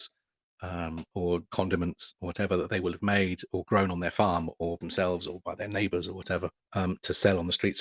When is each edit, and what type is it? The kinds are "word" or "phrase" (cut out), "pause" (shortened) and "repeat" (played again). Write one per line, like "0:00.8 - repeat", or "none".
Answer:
0:01.5 - word
0:04.8 - word
0:06.6 - pause